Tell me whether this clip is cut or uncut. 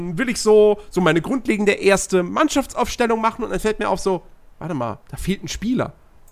cut